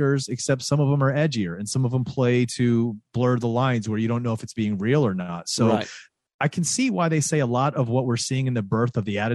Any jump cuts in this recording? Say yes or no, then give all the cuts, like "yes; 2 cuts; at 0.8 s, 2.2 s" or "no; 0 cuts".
no; 0 cuts